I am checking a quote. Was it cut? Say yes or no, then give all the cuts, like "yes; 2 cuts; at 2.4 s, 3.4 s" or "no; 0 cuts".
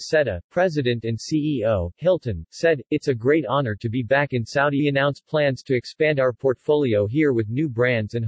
yes; 1 cut; at 4.8 s